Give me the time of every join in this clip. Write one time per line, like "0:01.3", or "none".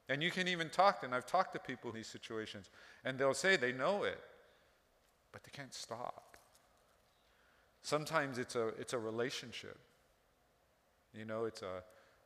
0:01.9